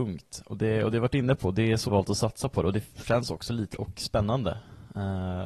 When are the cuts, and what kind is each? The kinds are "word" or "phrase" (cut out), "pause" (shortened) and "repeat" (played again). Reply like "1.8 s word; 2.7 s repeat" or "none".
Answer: 1.9 s word; 3.7 s word